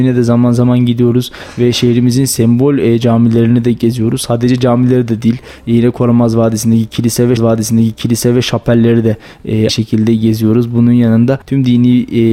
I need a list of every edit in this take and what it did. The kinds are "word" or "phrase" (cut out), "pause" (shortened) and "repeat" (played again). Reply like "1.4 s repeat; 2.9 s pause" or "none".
7.4 s repeat; 9.7 s word; 11.4 s pause